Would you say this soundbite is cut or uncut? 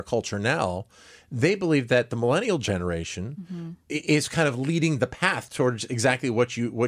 uncut